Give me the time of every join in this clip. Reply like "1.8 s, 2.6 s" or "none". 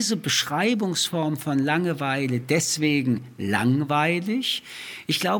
none